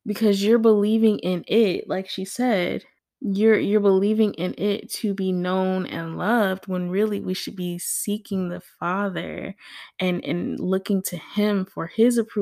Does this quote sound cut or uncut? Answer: cut